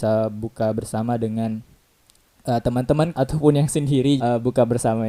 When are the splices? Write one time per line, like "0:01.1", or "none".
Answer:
0:03.1
0:04.2

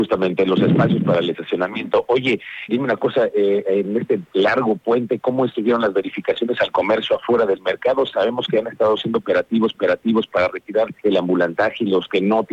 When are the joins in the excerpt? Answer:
0:02.7
0:09.7
0:11.0

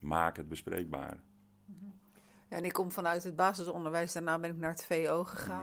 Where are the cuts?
none

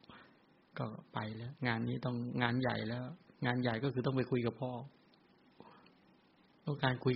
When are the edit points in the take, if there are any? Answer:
0:01.6
0:03.3

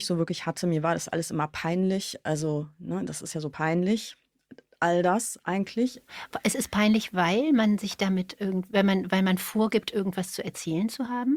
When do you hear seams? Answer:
none

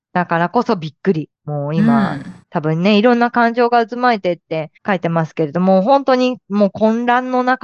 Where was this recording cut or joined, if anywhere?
0:01.3
0:02.4
0:04.8

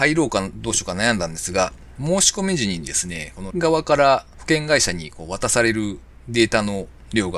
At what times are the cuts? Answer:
0:03.5

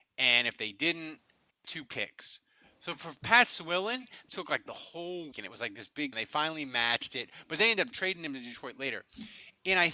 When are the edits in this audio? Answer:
0:01.6
0:04.3
0:05.3
0:06.1

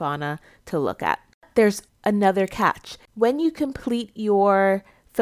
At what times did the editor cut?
0:01.9

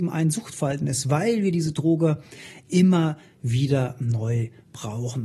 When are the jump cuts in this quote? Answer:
none

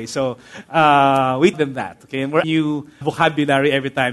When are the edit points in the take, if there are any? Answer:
0:01.5
0:02.4
0:03.0

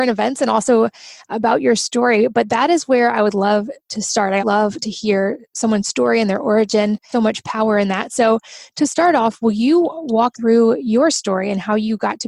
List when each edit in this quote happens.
0:04.4
0:05.5
0:07.1
0:10.3

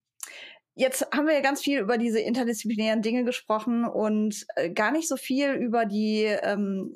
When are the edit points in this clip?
none

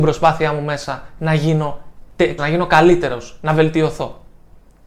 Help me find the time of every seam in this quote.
0:02.4

